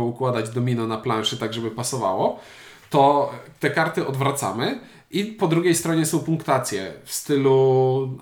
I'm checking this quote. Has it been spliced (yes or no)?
no